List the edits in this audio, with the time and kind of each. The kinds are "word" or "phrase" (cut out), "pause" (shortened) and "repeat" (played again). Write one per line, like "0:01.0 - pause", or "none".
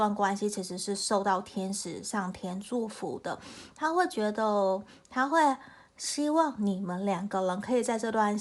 none